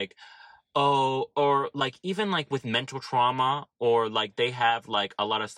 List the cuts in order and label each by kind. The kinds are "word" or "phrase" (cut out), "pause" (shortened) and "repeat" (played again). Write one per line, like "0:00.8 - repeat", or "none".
none